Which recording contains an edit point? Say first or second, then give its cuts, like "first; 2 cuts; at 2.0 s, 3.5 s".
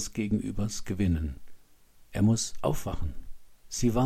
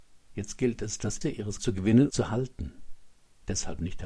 second; 3 cuts; at 1.2 s, 1.6 s, 2.1 s